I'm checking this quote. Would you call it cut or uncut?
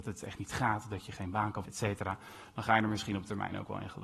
cut